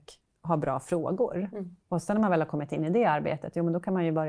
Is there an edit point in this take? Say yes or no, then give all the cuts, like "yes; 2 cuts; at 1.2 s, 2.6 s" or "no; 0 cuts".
yes; 1 cut; at 1.8 s